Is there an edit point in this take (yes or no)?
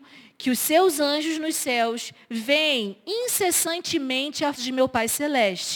yes